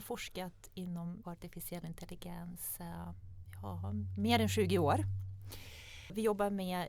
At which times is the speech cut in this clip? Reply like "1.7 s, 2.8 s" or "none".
1.2 s